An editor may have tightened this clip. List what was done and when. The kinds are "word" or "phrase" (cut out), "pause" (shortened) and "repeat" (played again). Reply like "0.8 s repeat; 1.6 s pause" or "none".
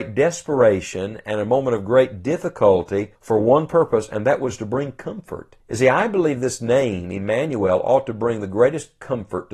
3.1 s pause; 5.6 s pause